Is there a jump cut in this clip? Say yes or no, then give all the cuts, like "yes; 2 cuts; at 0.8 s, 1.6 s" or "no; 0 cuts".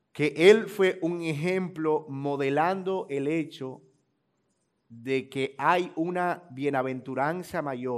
no; 0 cuts